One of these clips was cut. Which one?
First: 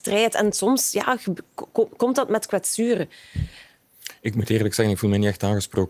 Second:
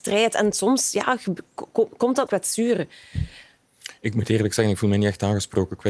second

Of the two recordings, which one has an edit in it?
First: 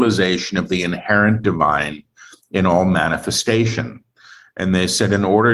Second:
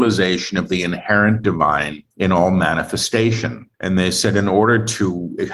second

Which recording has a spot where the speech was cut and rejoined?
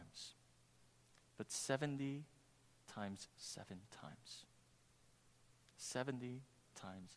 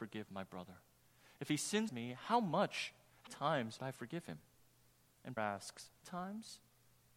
second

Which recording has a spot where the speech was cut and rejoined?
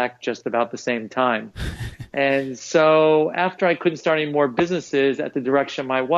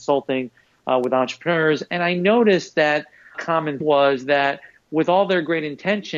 second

